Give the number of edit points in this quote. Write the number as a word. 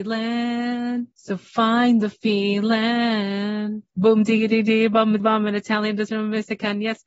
four